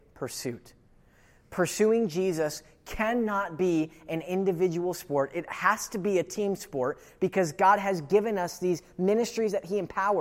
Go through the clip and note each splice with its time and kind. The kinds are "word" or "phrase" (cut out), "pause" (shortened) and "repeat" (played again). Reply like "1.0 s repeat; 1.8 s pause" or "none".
none